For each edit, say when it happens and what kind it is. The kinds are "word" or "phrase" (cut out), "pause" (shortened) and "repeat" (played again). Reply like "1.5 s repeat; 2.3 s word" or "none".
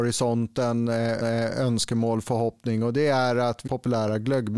1.2 s repeat; 3.7 s phrase